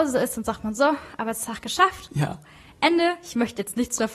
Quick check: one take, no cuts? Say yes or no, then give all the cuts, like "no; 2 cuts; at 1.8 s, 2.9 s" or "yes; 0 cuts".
yes; 0 cuts